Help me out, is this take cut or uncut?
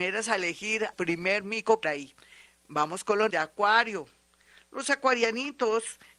cut